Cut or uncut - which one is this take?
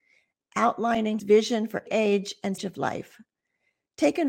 cut